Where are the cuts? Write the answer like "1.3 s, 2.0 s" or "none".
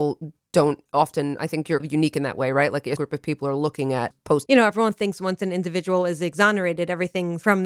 1.8 s, 3.0 s, 4.1 s, 4.5 s